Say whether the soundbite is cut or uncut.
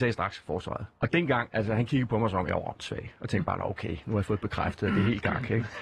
cut